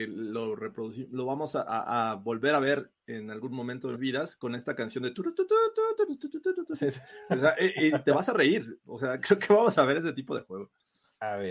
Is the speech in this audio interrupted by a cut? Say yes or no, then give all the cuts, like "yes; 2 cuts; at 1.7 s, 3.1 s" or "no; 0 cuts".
yes; 1 cut; at 3.9 s